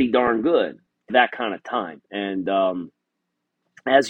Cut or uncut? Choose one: cut